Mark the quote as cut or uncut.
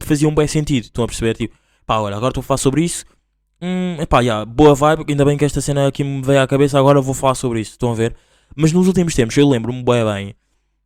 uncut